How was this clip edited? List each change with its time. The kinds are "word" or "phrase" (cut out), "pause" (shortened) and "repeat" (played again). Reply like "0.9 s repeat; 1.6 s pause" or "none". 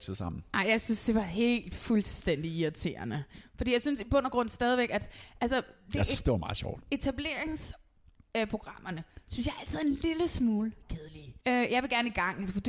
11.4 s pause